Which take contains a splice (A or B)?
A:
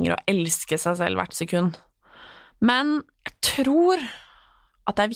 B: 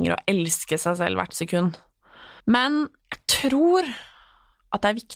B